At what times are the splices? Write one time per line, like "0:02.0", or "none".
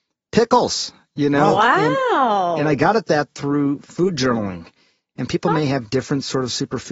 none